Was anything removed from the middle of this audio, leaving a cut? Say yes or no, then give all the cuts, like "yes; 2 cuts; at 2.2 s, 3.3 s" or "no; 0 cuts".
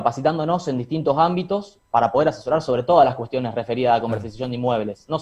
no; 0 cuts